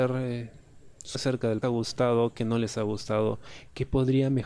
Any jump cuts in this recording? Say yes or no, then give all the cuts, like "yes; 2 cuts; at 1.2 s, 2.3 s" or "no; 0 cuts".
yes; 2 cuts; at 1.1 s, 1.6 s